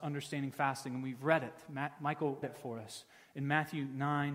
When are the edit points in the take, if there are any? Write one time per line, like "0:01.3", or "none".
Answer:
0:02.4